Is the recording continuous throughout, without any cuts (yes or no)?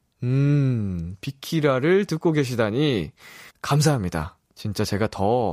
no